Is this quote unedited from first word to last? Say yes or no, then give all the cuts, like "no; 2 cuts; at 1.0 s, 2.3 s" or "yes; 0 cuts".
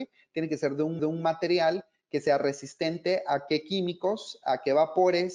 no; 1 cut; at 1.0 s